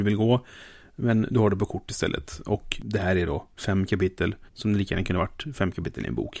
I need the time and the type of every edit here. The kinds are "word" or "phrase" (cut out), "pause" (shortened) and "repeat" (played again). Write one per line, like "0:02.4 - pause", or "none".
0:04.5 - pause